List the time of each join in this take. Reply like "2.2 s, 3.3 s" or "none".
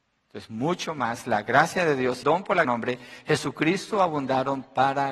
2.2 s, 2.6 s